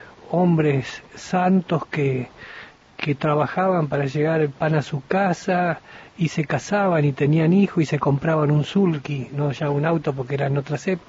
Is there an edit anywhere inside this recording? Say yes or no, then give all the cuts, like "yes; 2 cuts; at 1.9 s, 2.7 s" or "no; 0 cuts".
no; 0 cuts